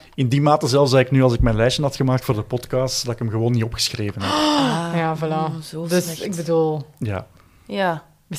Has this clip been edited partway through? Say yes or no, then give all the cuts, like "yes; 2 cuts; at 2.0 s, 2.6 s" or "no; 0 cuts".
no; 0 cuts